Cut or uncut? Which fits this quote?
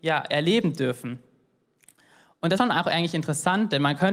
cut